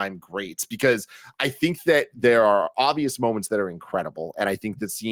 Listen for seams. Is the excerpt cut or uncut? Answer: uncut